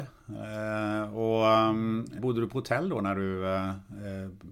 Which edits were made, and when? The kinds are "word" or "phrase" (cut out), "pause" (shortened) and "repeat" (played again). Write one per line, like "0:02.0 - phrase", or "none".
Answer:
0:02.2 - word